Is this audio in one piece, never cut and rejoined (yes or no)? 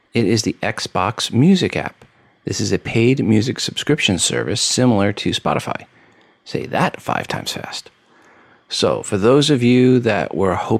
yes